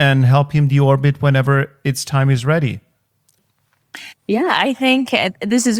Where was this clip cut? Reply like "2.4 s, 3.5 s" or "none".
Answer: none